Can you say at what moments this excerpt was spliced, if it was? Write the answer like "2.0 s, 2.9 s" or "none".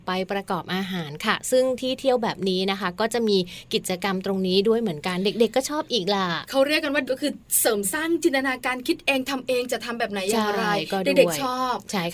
7.0 s